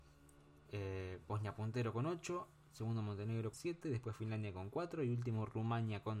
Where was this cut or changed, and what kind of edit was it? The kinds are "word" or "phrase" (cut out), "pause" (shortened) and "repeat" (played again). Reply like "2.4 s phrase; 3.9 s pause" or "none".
3.5 s word